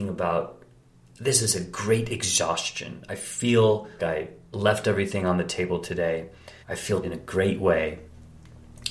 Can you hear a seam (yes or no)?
yes